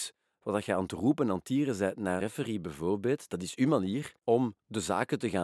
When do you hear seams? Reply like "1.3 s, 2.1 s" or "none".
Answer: 2.2 s, 4.2 s